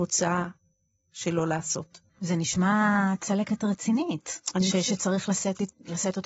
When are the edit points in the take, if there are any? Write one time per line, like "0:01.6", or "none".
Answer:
0:02.1

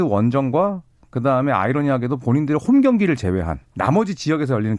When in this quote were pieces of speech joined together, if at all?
0:03.7

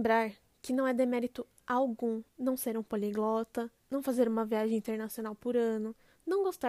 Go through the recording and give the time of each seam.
0:02.3

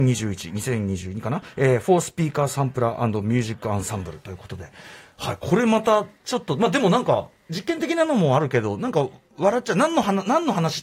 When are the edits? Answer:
none

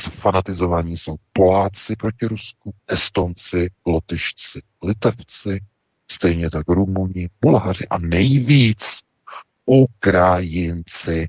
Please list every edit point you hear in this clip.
0:02.8

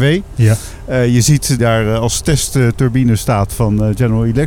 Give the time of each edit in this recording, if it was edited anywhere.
0:01.6

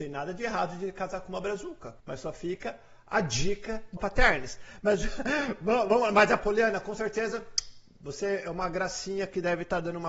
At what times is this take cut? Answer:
0:02.0
0:04.0
0:06.4

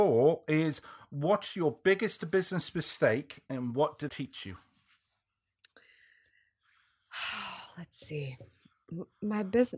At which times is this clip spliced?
0:04.1

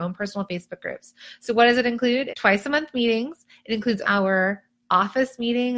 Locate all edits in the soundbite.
0:02.3
0:04.0

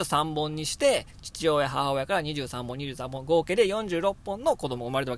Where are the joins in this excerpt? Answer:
0:01.1

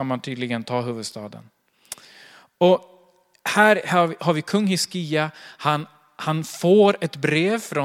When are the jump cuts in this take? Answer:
none

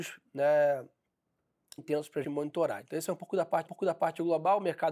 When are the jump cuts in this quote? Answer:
0:01.8
0:02.2
0:03.7

